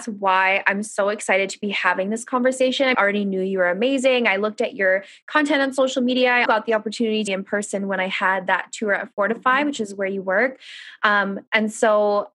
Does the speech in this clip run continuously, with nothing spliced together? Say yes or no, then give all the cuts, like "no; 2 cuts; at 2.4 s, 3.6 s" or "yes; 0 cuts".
no; 3 cuts; at 2.9 s, 6.5 s, 7.3 s